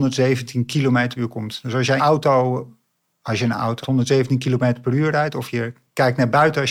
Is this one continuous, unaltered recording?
no; 3 cuts; at 1.2 s, 2.0 s, 3.8 s

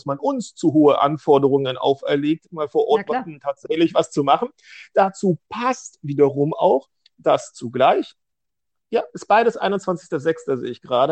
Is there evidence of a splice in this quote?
no; 0 cuts

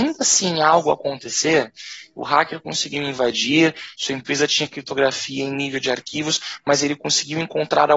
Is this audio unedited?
yes; 0 cuts

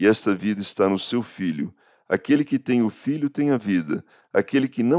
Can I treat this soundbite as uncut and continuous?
yes; 0 cuts

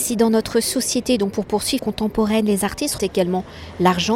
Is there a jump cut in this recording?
yes; 2 cuts; at 1.8 s, 3.0 s

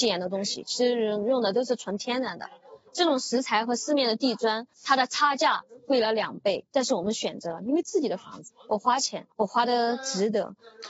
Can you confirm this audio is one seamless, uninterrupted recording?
no; 3 cuts; at 4.7 s, 6.7 s, 9.3 s

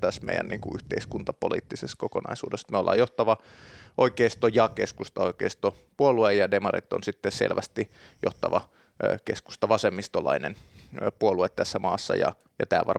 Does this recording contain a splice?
no; 0 cuts

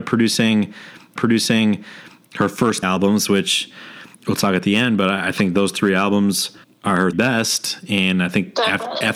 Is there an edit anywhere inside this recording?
yes; 5 cuts; at 1.2 s, 2.8 s, 4.1 s, 6.6 s, 7.1 s

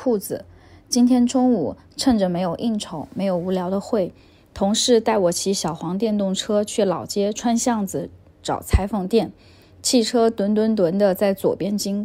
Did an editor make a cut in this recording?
no; 0 cuts

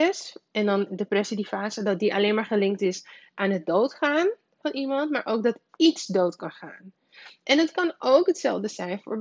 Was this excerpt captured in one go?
yes; 0 cuts

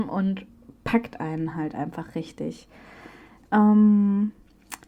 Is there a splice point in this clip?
no; 0 cuts

